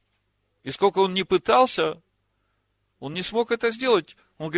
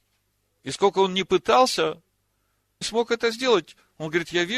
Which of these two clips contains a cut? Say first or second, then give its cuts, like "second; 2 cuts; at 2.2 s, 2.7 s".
second; 1 cut; at 2.8 s